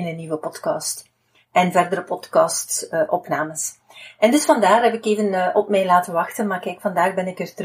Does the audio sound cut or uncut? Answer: uncut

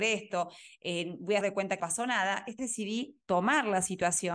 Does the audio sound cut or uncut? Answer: cut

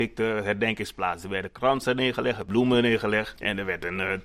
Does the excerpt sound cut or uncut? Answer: uncut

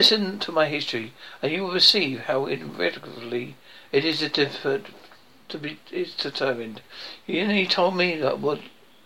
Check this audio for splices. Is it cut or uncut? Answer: uncut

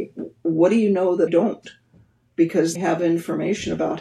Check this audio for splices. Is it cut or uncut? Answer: cut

